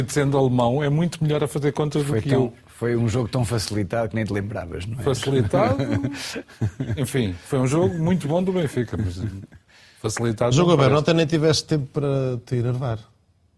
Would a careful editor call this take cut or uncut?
uncut